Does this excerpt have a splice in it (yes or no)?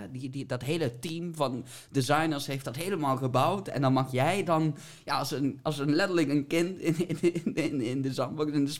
no